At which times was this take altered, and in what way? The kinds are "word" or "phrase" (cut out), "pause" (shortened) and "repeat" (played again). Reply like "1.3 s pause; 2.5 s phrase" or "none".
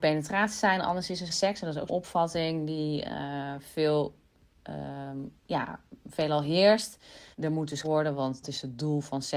1.3 s word; 1.9 s word; 5.4 s pause; 7.3 s pause; 7.8 s word; 8.4 s word